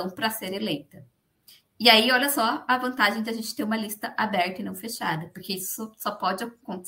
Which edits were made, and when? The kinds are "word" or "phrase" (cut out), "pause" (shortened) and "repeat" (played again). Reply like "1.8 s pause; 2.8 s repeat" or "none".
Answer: none